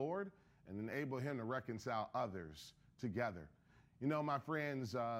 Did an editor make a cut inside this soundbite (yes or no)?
no